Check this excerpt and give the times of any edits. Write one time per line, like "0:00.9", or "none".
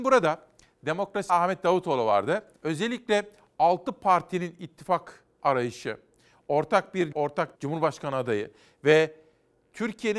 0:01.3
0:02.6
0:07.1
0:07.6